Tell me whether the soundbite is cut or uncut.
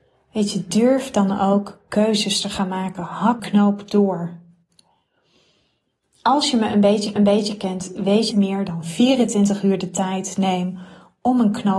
cut